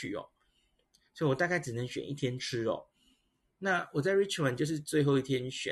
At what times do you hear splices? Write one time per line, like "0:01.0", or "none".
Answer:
none